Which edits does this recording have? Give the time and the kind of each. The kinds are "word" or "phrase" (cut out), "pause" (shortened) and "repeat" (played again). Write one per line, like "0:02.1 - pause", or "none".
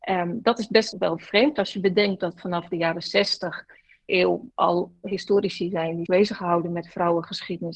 0:00.9 - word
0:04.1 - phrase
0:06.1 - word